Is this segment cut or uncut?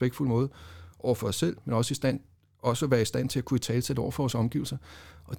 uncut